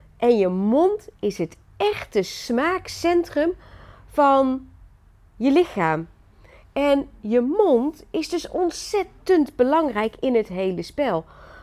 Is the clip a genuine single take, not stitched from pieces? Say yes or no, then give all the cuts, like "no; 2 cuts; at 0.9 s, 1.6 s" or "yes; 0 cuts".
yes; 0 cuts